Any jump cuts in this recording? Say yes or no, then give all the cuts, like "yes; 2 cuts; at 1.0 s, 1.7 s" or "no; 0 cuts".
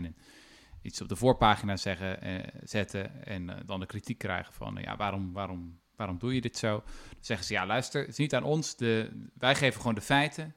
no; 0 cuts